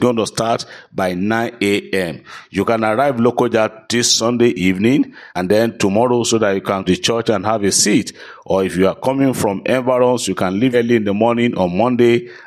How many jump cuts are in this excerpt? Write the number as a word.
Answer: three